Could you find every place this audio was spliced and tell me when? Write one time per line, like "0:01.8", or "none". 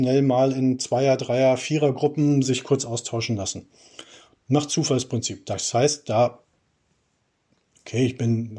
none